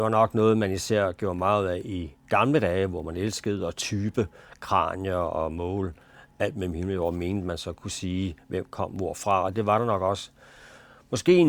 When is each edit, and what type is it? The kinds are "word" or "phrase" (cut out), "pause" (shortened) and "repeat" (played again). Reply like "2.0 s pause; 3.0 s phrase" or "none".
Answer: none